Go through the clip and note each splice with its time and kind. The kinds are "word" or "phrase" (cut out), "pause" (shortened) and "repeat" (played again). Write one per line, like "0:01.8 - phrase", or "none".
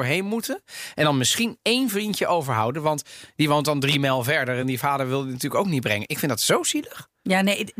none